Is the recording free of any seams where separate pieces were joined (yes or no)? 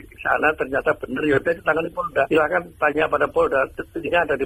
yes